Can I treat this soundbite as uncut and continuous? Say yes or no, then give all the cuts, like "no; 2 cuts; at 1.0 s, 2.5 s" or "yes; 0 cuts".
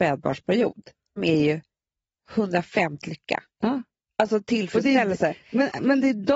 no; 2 cuts; at 1.2 s, 3.0 s